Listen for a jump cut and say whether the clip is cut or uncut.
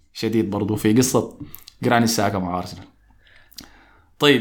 uncut